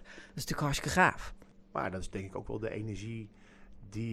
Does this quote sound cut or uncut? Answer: uncut